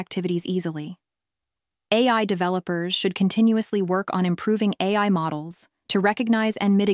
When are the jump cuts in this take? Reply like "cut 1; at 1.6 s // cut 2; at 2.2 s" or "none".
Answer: none